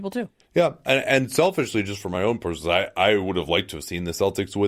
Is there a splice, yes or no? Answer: no